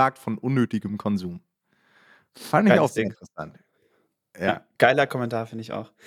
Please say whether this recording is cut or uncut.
uncut